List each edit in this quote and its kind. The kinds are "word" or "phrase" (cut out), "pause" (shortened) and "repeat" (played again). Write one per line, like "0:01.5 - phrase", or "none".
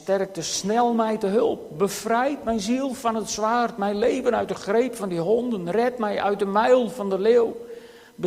none